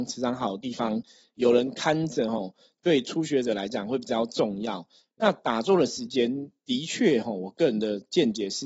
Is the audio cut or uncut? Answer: uncut